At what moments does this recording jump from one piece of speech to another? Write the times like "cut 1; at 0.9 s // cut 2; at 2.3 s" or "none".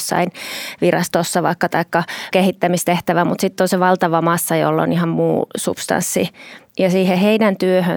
cut 1; at 2.3 s // cut 2; at 6.7 s